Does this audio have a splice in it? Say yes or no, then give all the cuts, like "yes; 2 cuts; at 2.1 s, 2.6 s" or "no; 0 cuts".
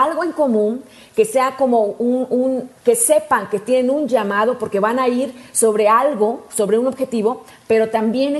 yes; 1 cut; at 2.8 s